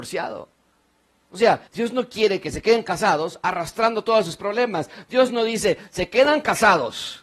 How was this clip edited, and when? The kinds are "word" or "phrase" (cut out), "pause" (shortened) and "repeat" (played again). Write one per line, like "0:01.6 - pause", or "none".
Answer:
0:01.7 - pause